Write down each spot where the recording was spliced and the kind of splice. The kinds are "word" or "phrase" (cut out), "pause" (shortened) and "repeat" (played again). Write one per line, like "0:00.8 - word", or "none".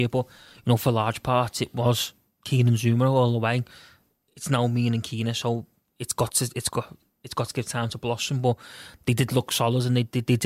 none